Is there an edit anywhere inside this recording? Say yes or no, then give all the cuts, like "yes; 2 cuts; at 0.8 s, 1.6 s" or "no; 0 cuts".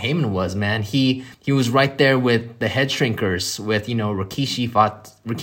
yes; 1 cut; at 1.3 s